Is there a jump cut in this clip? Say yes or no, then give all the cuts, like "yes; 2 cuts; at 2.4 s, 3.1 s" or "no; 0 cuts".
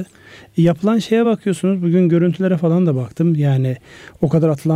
no; 0 cuts